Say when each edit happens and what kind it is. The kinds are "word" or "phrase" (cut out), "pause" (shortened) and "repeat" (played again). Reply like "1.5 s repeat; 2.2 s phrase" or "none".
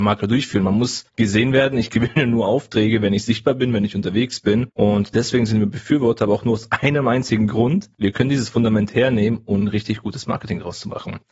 1.1 s pause; 4.7 s pause